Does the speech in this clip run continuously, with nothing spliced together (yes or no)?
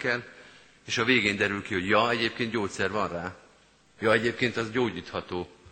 yes